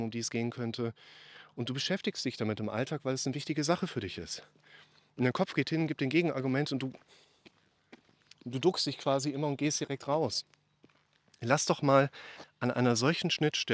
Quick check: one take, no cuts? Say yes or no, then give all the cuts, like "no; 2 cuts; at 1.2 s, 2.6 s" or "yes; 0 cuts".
yes; 0 cuts